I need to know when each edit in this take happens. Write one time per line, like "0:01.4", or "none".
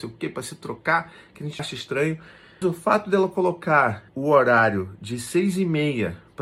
0:01.6
0:02.6
0:04.1